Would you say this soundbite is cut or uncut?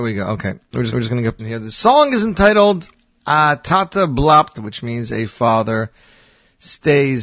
cut